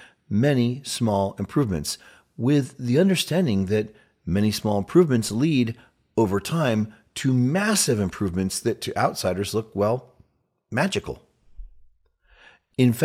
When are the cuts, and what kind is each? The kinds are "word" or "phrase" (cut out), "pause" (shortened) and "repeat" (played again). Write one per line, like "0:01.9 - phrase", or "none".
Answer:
none

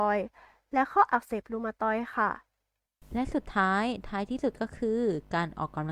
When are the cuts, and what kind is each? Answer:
0:02.8 - pause

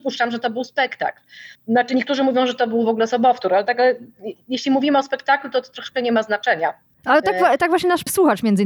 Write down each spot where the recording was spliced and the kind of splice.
0:01.5 - pause
0:06.9 - pause

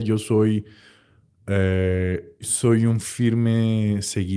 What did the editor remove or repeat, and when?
0:02.4 - word

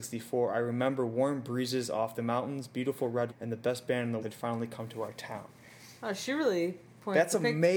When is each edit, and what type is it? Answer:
0:03.3 - phrase
0:04.2 - word
0:06.0 - pause

